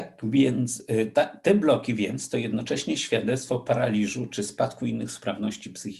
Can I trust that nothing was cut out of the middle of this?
yes; 0 cuts

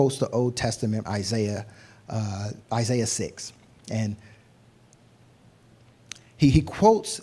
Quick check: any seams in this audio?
yes; 2 cuts; at 1.0 s, 2.6 s

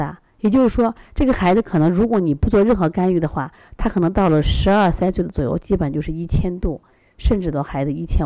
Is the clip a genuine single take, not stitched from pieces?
yes; 0 cuts

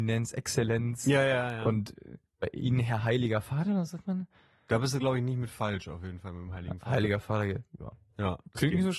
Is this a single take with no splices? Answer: yes; 0 cuts

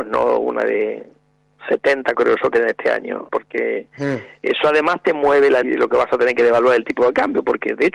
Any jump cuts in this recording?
yes; 4 cuts; at 2.1 s, 2.5 s, 3.3 s, 5.6 s

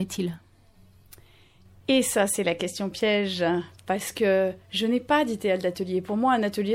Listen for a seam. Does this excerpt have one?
no; 0 cuts

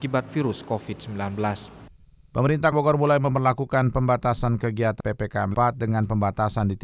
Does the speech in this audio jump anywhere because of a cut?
yes; 3 cuts; at 2.7 s, 5.0 s, 5.5 s

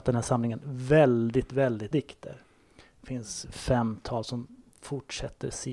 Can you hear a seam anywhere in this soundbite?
yes; 2 cuts; at 1.9 s, 3.4 s

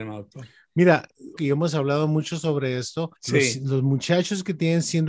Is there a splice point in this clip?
yes; 2 cuts; at 1.4 s, 3.2 s

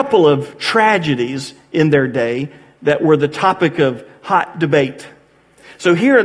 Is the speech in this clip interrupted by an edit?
no; 0 cuts

